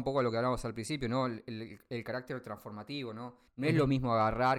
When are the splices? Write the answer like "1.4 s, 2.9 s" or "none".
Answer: 3.5 s